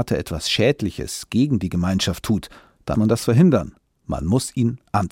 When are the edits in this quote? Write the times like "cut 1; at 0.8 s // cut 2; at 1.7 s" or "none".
cut 1; at 2.9 s